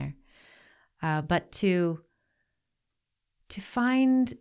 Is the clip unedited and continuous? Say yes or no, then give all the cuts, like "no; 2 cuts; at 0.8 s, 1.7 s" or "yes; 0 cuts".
yes; 0 cuts